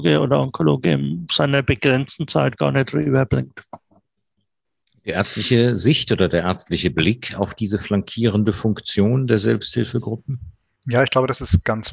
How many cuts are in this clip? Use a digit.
0